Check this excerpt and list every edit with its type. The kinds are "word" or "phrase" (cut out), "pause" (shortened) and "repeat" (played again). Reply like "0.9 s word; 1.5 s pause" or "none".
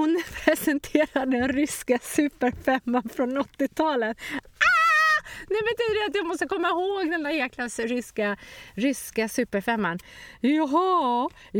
none

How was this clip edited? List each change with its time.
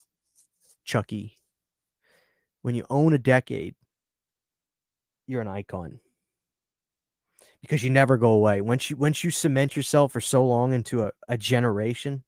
none

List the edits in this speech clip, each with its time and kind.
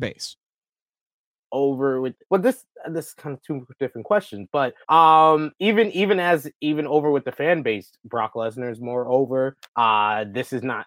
2.2 s pause; 4.8 s pause; 9.7 s pause

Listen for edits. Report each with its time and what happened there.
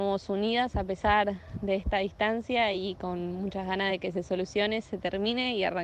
none

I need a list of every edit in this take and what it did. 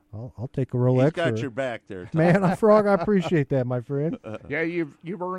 4.4 s word

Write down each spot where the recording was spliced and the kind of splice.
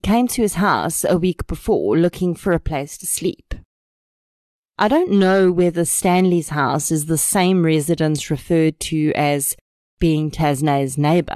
none

